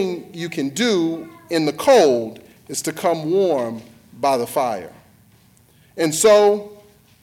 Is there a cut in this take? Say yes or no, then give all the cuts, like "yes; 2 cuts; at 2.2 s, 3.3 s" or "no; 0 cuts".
no; 0 cuts